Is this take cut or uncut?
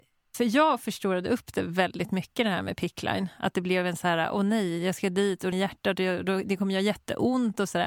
cut